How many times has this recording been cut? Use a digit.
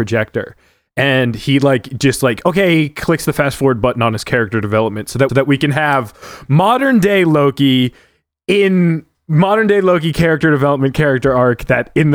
1